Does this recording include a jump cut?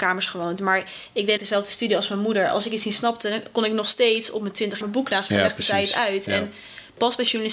yes; 3 cuts; at 1.4 s, 4.8 s, 5.3 s

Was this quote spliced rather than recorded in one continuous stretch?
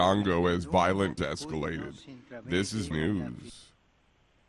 yes; 2 cuts; at 1.2 s, 2.9 s

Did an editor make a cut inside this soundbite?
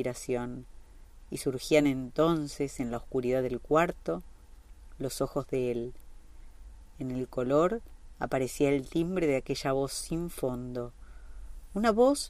no; 0 cuts

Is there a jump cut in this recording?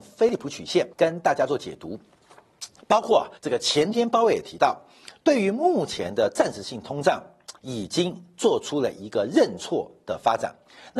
yes; 3 cuts; at 0.9 s, 3.4 s, 7.6 s

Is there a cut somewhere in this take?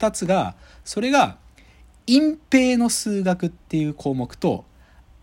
no; 0 cuts

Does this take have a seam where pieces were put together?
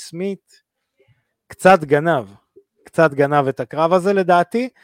no; 0 cuts

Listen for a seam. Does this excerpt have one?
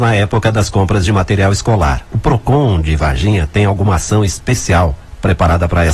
no; 0 cuts

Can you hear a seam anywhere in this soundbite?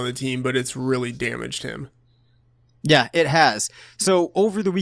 no; 0 cuts

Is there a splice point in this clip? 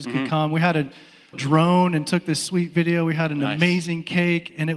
yes; 1 cut; at 1.3 s

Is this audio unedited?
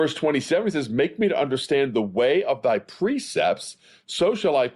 yes; 0 cuts

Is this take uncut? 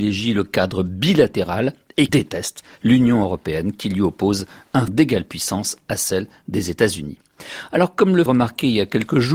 no; 3 cuts; at 2.1 s, 4.9 s, 8.3 s

